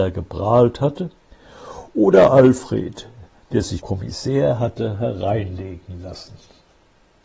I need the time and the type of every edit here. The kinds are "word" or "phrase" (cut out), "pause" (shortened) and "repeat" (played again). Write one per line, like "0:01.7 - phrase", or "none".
0:03.8 - word